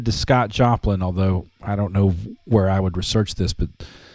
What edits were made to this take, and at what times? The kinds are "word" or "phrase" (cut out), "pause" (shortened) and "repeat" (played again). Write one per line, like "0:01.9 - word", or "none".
none

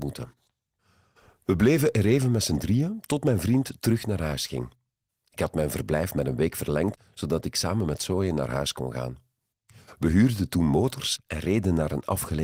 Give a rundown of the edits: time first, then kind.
none

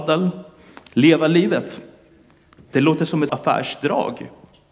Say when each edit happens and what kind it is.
0:03.3 - word

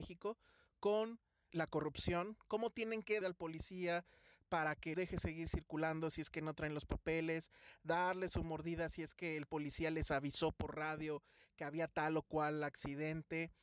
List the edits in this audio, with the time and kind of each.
0:01.5 - word
0:03.2 - phrase
0:04.9 - word

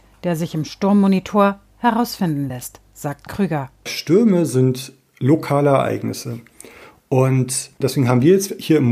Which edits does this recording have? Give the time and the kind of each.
none

